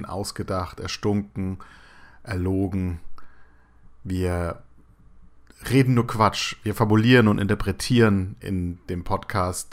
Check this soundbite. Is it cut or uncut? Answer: cut